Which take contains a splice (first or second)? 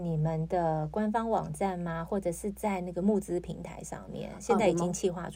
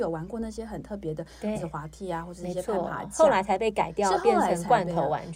second